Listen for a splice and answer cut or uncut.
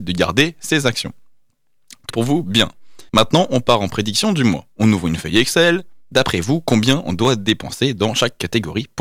cut